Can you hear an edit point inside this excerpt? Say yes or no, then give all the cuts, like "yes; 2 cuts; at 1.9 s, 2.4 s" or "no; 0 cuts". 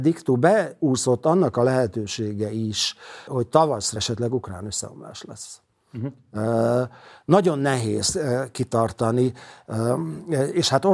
yes; 2 cuts; at 3.3 s, 4.0 s